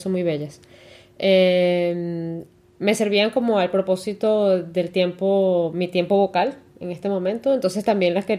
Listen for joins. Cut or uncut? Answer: uncut